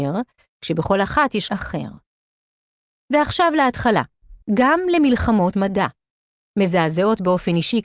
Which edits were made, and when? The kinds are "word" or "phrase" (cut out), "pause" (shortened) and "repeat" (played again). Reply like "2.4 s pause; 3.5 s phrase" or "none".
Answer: 1.5 s phrase; 4.4 s pause; 5.5 s word